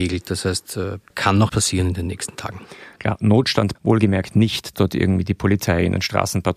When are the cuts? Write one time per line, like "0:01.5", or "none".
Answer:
0:01.1
0:01.5
0:03.7
0:04.7